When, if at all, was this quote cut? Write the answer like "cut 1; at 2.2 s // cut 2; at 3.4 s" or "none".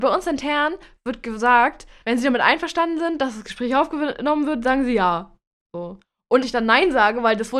cut 1; at 2.0 s // cut 2; at 6.4 s